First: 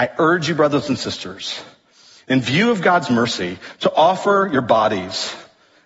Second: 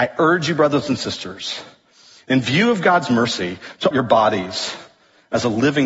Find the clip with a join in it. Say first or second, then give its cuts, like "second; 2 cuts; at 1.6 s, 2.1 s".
second; 1 cut; at 3.9 s